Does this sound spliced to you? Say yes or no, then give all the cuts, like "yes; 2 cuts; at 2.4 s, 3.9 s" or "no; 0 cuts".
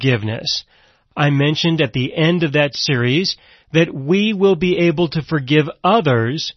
no; 0 cuts